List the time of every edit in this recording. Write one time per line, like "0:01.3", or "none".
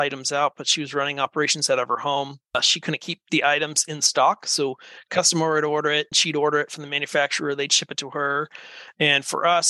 0:06.1